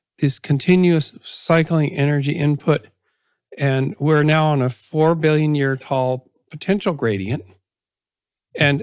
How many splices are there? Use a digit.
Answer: 0